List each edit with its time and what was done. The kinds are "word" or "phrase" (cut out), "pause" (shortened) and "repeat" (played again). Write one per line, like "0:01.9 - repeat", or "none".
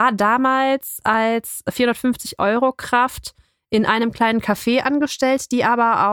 none